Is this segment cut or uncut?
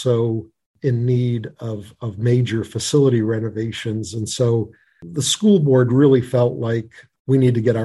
uncut